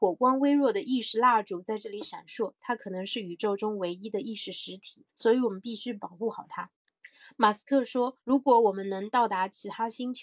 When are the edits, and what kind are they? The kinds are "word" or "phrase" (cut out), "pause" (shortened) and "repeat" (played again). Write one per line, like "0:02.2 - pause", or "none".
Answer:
0:05.1 - pause
0:06.8 - pause
0:08.2 - pause